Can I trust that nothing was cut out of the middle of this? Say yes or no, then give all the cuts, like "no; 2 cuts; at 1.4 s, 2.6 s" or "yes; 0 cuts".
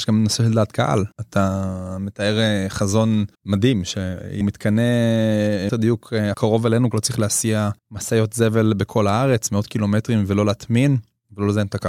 no; 7 cuts; at 1.1 s, 3.3 s, 4.4 s, 5.7 s, 6.3 s, 6.9 s, 7.8 s